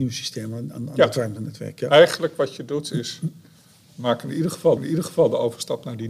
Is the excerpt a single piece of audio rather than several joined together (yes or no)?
no